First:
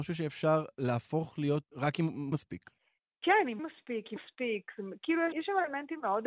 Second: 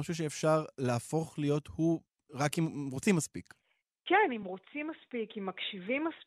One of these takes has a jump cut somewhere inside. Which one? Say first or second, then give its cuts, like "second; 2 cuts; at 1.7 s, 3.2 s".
first; 5 cuts; at 1.6 s, 2.3 s, 3.6 s, 4.2 s, 5.3 s